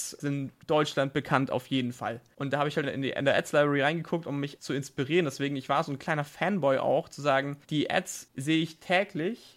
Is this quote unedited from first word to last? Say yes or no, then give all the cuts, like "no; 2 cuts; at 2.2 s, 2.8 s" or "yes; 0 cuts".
no; 3 cuts; at 2.8 s, 4.6 s, 7.6 s